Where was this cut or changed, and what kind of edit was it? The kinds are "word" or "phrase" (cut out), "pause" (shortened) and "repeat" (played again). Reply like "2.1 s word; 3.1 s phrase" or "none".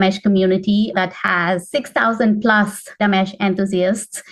3.0 s word